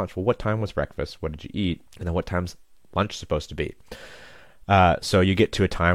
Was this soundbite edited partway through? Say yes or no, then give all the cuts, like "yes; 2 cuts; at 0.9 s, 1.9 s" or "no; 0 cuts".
yes; 1 cut; at 1.9 s